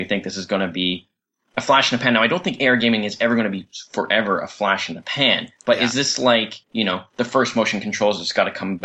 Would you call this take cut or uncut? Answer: cut